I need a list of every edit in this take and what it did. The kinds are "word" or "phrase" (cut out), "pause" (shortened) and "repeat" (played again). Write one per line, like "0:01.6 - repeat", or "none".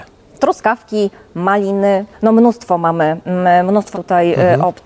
0:02.1 - word
0:03.9 - word